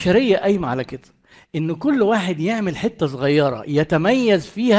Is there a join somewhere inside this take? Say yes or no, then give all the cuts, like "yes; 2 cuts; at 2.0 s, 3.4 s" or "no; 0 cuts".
no; 0 cuts